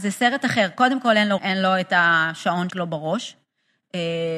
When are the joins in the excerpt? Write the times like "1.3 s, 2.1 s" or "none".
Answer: 1.4 s, 2.7 s